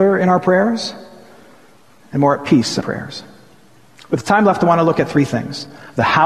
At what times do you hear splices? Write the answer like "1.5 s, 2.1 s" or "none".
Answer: 2.8 s